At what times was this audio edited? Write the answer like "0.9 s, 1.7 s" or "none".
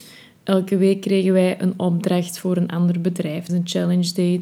3.5 s

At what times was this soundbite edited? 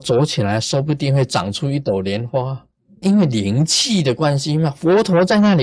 3.0 s

